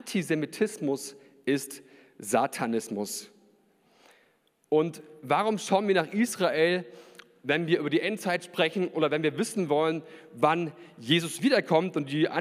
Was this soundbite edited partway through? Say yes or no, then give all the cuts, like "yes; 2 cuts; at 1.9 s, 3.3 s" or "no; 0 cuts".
no; 0 cuts